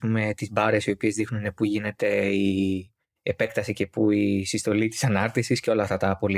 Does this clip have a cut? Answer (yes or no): no